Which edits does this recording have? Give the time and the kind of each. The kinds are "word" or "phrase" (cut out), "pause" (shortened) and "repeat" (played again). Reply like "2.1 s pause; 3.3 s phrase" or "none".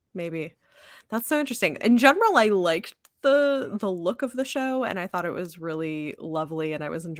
none